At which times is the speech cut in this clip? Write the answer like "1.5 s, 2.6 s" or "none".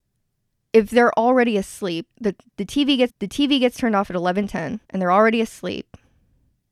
2.1 s, 3.1 s, 4.8 s